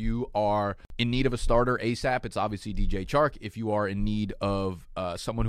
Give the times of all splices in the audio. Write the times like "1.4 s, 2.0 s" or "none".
none